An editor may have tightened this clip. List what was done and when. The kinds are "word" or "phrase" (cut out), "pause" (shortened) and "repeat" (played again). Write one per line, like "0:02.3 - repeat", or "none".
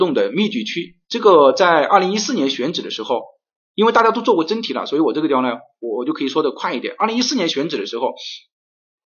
0:01.0 - pause